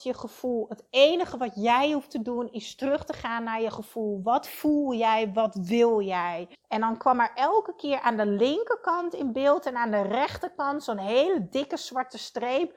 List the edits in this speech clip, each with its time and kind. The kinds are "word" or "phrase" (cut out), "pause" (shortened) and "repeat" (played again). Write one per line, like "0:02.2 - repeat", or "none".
0:06.5 - pause